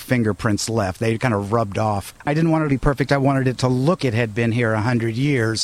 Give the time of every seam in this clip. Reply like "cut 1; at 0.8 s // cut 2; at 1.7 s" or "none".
cut 1; at 2.7 s // cut 2; at 4.0 s